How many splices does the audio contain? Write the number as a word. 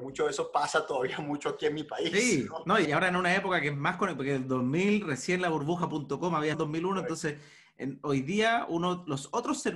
two